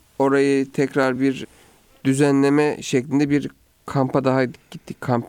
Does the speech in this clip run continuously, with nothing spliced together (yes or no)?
yes